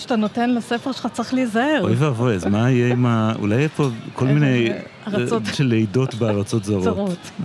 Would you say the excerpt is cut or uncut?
cut